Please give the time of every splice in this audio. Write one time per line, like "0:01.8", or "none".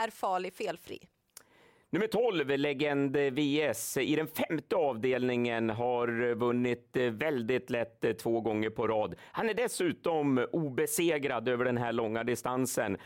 none